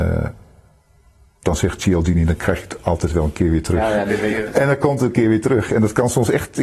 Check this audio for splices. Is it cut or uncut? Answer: uncut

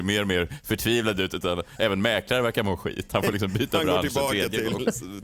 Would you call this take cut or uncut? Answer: uncut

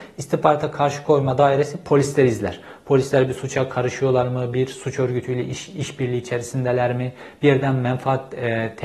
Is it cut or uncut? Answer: uncut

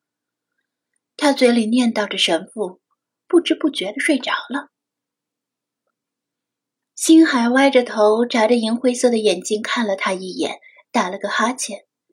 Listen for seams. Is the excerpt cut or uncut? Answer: uncut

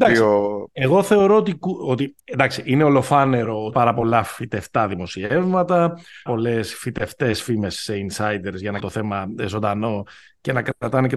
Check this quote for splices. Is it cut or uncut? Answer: cut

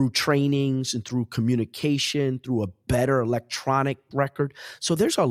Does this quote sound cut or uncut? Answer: cut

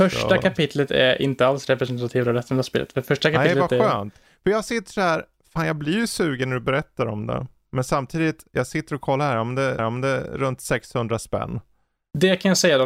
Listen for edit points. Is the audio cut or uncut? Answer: cut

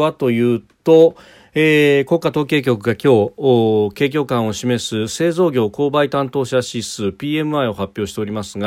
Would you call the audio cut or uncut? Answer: uncut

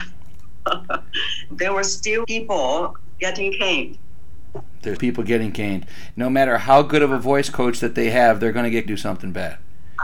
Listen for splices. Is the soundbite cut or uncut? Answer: cut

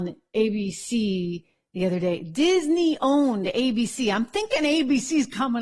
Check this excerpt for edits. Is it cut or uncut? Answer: uncut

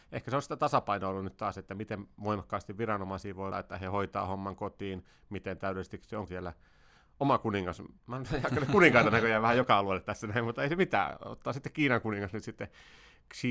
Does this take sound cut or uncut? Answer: cut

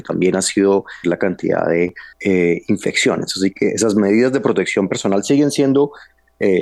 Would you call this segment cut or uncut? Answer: cut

